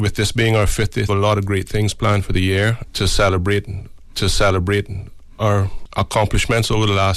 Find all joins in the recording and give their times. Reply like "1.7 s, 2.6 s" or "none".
1.1 s, 4.1 s